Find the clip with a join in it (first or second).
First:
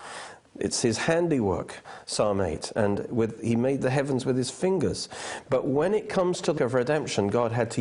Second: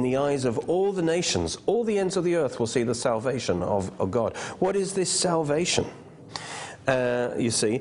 first